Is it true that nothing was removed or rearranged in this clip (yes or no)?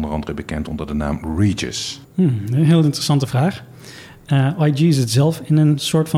yes